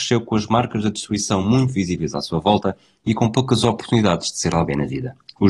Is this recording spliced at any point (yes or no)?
no